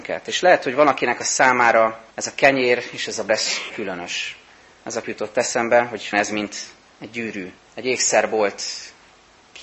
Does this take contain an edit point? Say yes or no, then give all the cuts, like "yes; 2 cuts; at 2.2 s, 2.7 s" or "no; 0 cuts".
yes; 6 cuts; at 2.1 s, 3.3 s, 3.7 s, 5.0 s, 6.1 s, 7.6 s